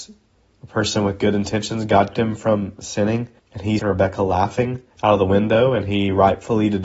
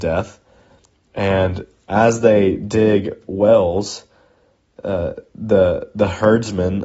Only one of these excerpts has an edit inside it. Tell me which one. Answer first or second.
first